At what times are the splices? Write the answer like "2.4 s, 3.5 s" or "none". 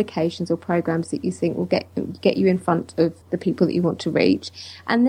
3.2 s